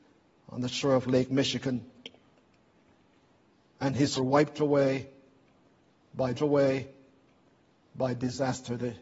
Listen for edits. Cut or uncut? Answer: cut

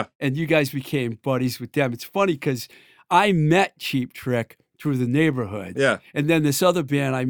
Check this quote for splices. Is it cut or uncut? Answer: uncut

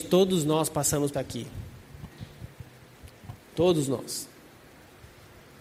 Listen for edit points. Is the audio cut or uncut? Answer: cut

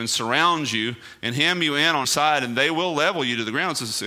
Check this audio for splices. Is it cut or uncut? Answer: cut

